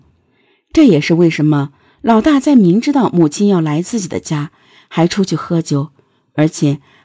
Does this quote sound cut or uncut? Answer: uncut